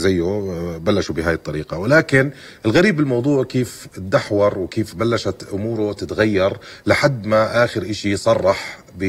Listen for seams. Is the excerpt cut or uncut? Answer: uncut